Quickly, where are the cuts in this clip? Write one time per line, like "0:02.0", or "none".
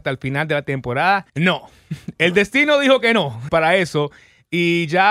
0:01.3
0:03.5